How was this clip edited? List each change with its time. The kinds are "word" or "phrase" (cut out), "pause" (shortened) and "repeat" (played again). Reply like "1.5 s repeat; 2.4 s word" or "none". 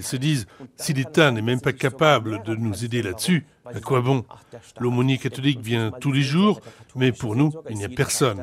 none